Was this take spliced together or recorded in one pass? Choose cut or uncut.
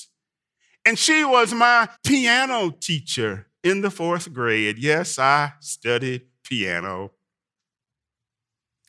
cut